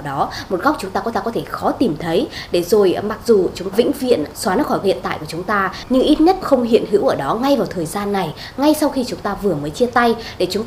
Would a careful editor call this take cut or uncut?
cut